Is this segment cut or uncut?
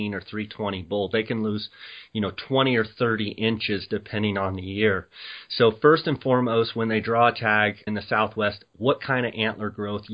cut